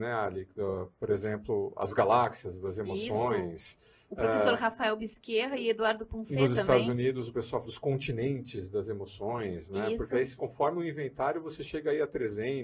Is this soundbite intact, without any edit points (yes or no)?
no